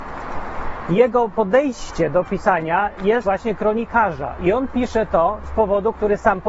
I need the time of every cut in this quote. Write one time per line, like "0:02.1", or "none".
0:03.2